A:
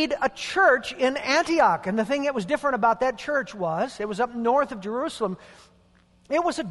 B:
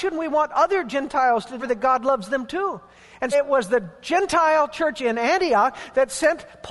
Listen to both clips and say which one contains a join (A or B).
B